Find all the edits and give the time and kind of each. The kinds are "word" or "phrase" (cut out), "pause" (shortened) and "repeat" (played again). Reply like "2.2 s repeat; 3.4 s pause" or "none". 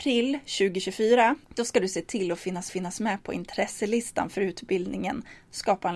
1.4 s pause; 2.7 s repeat